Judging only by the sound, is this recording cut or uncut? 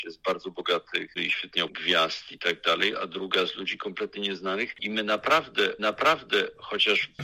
cut